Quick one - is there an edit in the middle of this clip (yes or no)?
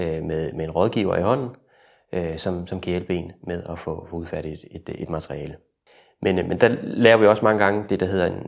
no